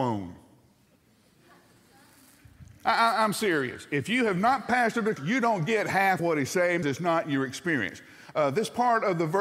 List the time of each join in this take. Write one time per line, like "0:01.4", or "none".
0:05.2
0:06.2
0:06.8